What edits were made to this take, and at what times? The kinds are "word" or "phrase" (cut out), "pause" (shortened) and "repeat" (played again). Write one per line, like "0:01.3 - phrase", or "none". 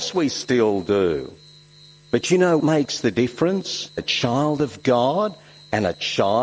0:02.6 - word
0:04.0 - word